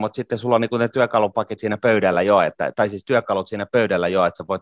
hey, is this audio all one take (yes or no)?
yes